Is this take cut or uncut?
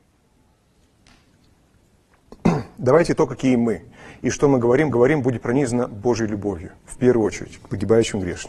cut